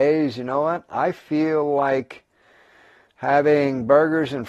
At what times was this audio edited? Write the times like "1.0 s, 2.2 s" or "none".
none